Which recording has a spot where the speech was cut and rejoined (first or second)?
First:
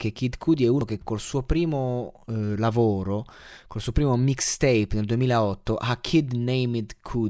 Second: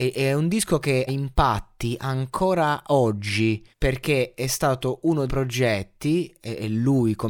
second